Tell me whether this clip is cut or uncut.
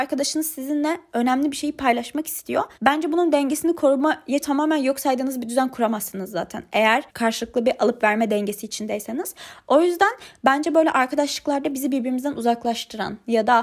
cut